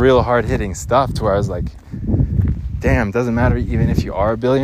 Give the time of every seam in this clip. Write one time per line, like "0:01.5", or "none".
none